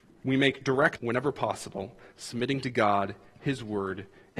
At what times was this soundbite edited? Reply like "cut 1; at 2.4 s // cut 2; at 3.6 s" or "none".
cut 1; at 1.0 s